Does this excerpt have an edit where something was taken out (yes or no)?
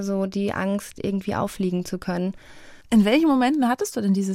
yes